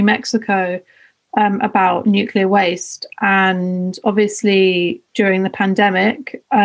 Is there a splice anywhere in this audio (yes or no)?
yes